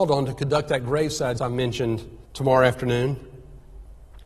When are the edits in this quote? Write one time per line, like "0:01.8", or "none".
0:01.4
0:02.3